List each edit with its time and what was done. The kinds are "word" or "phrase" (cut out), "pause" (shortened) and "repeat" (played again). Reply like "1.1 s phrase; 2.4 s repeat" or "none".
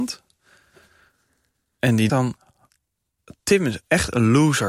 2.1 s word

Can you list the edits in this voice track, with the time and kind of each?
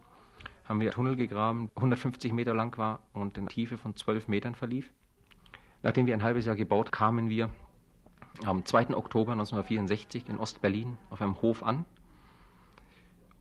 0.9 s word; 1.7 s word; 3.5 s word; 6.9 s word

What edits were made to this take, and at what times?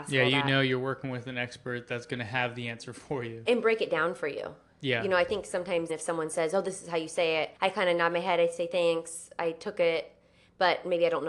3.5 s word; 5.9 s word; 7.6 s pause

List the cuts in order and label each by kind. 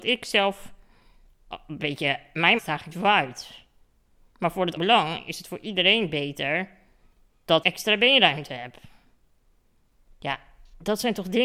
2.6 s word; 2.9 s word; 4.8 s word; 7.6 s word

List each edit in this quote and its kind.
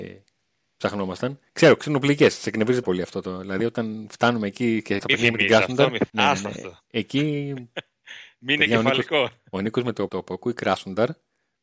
2.8 s word; 5.0 s word; 6.1 s pause; 10.1 s word

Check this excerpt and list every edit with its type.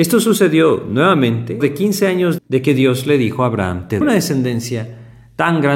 1.6 s word; 2.4 s word; 4.0 s word

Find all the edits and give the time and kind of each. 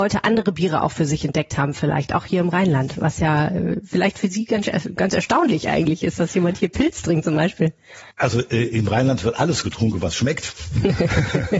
8.1 s pause

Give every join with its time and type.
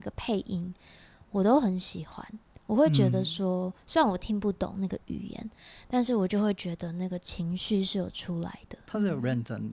none

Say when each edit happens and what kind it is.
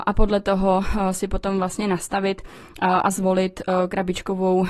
none

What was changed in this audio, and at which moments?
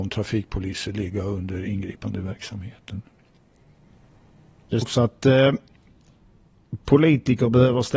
4.8 s word

